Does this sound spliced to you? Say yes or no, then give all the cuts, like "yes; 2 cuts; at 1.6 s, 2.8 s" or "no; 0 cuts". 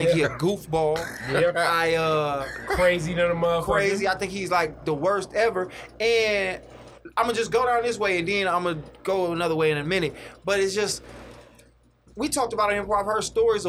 no; 0 cuts